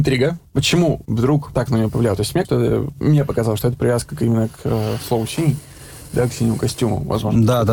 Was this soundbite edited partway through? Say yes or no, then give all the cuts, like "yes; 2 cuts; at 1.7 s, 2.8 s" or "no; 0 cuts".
yes; 2 cuts; at 1.0 s, 2.4 s